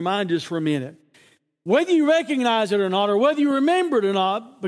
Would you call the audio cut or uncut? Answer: uncut